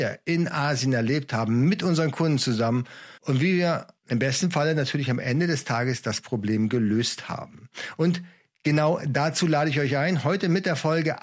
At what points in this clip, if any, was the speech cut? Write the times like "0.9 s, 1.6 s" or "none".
3.2 s, 4.0 s